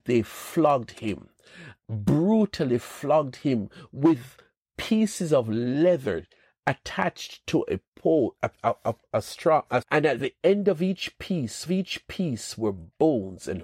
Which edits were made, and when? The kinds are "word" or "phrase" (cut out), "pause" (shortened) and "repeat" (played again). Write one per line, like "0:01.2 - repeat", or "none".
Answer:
0:08.6 - pause
0:09.0 - pause
0:09.8 - word
0:11.7 - repeat